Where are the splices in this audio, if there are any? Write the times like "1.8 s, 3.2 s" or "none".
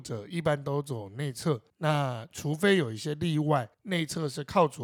1.7 s, 3.7 s